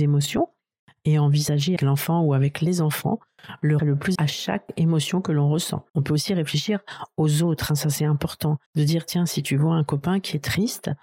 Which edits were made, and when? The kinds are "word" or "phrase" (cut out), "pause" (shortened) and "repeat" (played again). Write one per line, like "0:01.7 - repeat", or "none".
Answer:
0:01.8 - word
0:03.8 - phrase
0:04.1 - word
0:05.9 - pause
0:08.7 - pause